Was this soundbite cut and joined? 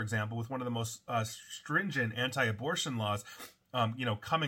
no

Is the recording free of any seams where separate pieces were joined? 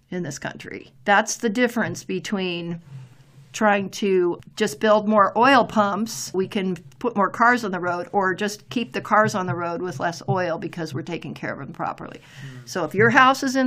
no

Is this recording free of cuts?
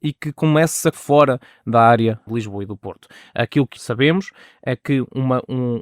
no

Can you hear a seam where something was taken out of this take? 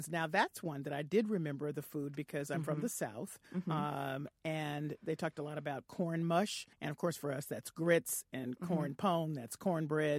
yes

